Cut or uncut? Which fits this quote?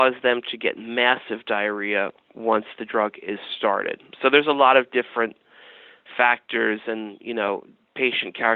uncut